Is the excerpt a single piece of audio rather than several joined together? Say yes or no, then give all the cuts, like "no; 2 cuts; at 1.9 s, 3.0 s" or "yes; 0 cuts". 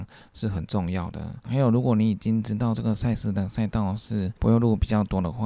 no; 1 cut; at 4.4 s